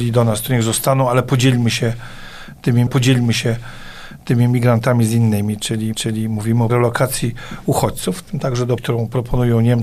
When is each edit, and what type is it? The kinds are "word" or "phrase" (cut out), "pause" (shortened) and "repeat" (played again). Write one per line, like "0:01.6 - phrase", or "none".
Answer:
0:02.9 - repeat
0:05.9 - repeat
0:06.7 - word
0:08.8 - word